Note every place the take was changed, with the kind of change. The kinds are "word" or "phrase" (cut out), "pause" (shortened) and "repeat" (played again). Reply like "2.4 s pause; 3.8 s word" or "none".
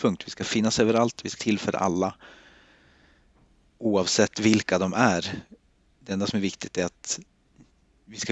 1.4 s word